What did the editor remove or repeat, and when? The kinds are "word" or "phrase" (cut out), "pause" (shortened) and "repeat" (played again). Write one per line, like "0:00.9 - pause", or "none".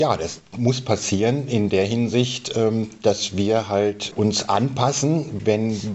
none

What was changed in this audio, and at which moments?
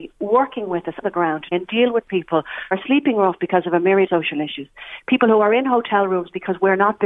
0:01.0 - word
0:01.5 - word
0:02.7 - word
0:04.1 - word

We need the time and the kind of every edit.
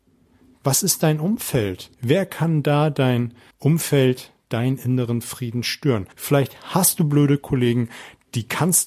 0:01.9 - pause
0:03.5 - pause
0:06.1 - pause

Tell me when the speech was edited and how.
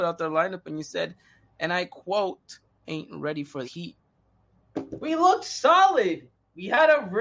0:02.8 - word
0:03.6 - word

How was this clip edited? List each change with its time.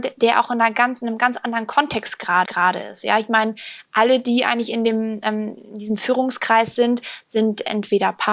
0:02.5 - repeat

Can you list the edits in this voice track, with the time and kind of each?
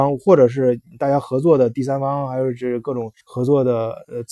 0:03.2 - pause

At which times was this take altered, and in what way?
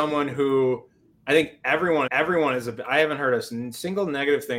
0:02.1 - repeat

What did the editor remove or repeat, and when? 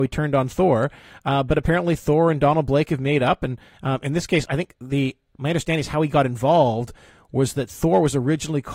none

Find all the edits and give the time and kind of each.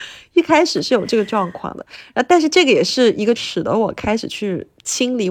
0:03.4 - word

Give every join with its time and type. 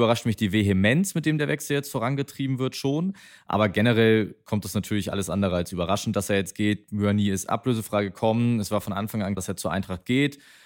0:09.4 - word

